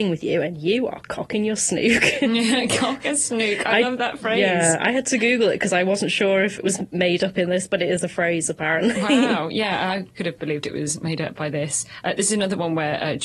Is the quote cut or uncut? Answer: cut